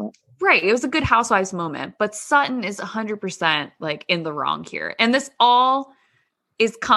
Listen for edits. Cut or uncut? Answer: uncut